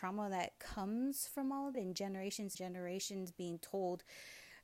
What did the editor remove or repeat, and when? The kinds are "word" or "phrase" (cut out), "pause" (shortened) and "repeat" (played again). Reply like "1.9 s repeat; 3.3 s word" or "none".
1.7 s word; 2.5 s word